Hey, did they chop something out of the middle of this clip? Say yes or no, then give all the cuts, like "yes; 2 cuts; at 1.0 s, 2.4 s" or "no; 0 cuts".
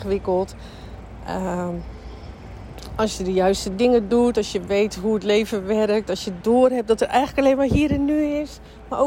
no; 0 cuts